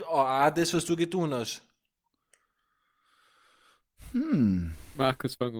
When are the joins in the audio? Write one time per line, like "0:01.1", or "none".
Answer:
none